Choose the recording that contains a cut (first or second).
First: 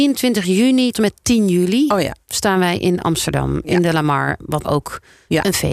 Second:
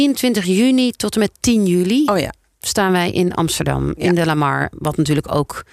first